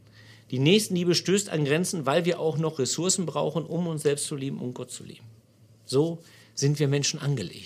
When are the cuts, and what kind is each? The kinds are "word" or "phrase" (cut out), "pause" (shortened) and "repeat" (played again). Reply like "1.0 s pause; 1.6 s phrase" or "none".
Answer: 5.4 s pause